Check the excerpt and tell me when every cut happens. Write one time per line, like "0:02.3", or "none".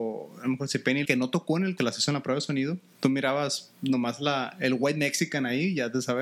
0:01.0
0:01.8